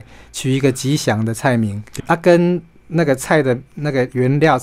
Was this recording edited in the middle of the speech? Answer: yes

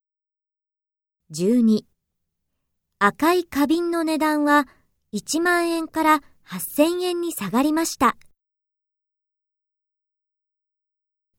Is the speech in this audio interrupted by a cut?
no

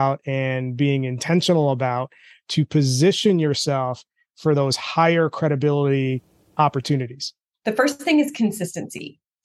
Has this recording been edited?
no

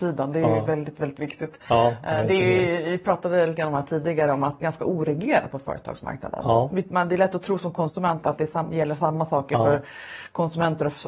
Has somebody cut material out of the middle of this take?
yes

